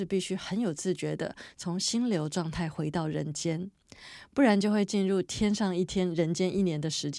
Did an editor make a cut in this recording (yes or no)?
no